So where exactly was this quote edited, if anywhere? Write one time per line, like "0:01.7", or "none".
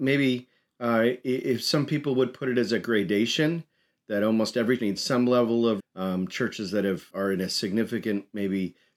0:04.8
0:05.8
0:07.1